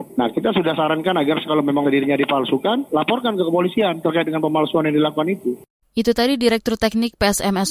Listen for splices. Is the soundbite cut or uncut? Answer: cut